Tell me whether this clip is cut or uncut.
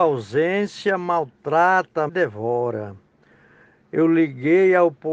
cut